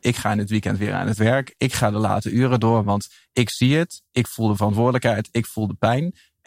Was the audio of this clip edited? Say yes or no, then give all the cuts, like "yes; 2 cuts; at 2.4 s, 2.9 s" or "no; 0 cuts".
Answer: no; 0 cuts